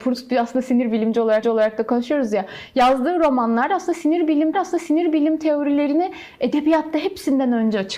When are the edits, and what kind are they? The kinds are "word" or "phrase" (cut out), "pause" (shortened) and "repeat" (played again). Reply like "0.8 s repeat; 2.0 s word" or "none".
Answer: 1.4 s repeat; 4.5 s repeat